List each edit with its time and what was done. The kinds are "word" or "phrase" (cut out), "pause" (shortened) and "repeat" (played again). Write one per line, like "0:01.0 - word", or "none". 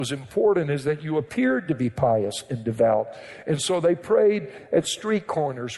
none